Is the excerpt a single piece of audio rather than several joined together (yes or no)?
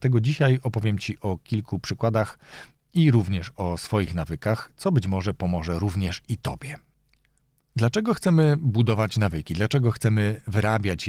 yes